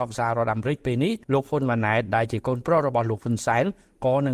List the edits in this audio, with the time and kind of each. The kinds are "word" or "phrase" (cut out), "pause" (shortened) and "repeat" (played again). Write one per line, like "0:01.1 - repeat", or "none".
0:01.2 - pause